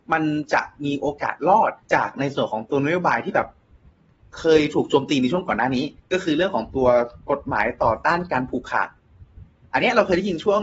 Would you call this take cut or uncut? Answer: cut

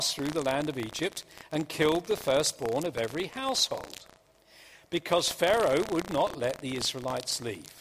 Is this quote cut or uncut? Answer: uncut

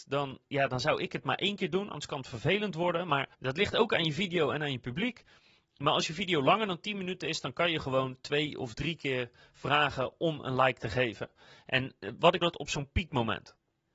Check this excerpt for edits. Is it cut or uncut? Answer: cut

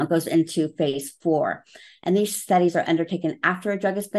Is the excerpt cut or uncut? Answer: uncut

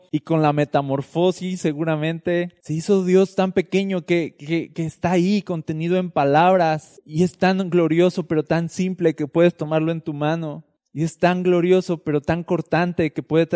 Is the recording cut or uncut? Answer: uncut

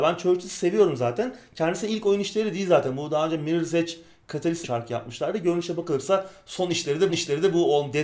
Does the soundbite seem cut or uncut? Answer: cut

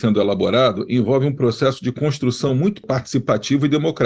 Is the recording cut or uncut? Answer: uncut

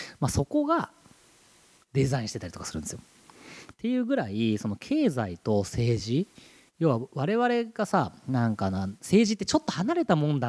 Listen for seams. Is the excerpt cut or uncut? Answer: uncut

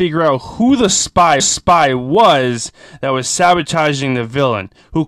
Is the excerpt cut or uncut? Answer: cut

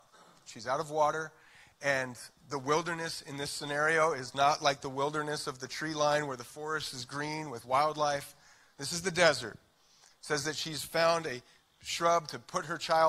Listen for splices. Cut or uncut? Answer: uncut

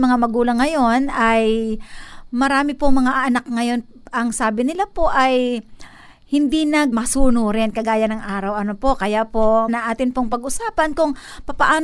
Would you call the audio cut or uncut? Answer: cut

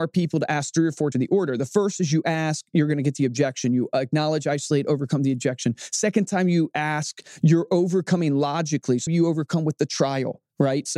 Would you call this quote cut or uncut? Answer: cut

